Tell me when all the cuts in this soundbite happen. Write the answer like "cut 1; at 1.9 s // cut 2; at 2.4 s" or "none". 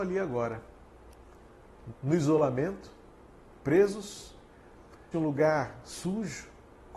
cut 1; at 1.9 s // cut 2; at 5.1 s